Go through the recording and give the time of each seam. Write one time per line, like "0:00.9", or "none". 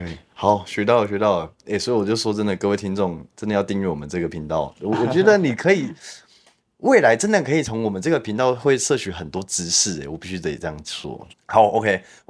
0:11.3